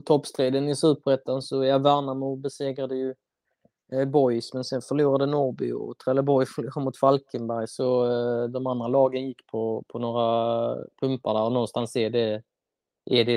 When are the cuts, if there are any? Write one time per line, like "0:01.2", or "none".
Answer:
none